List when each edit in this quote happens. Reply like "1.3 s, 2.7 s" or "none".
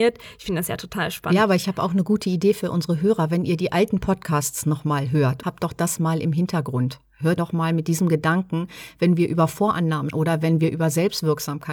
7.4 s, 10.1 s